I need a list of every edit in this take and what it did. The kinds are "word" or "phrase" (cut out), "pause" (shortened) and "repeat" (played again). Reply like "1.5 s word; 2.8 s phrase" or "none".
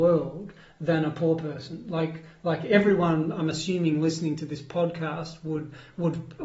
none